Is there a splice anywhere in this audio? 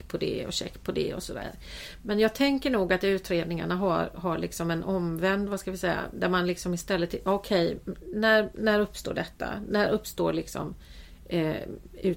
no; 0 cuts

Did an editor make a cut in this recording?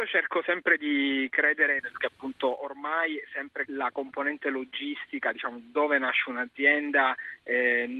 yes; 2 cuts; at 2.0 s, 3.6 s

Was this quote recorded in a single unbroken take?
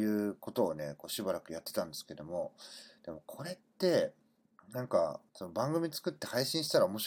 no; 2 cuts; at 4.5 s, 5.3 s

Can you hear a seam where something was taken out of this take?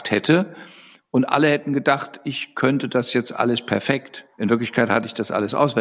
yes; 1 cut; at 4.3 s

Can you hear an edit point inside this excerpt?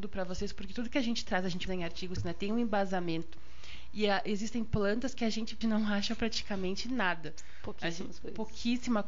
yes; 3 cuts; at 1.7 s, 2.2 s, 5.6 s

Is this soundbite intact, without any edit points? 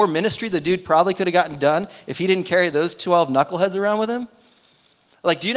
yes; 0 cuts

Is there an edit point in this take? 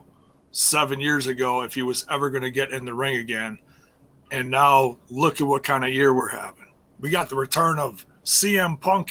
no; 0 cuts

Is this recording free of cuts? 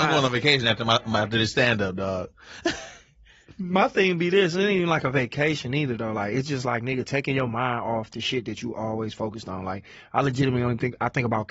yes; 0 cuts

